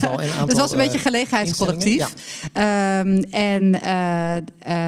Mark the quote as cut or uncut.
uncut